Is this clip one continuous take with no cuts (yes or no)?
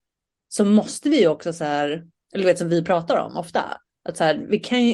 yes